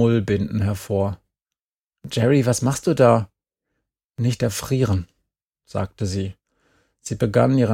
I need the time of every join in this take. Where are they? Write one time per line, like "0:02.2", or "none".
none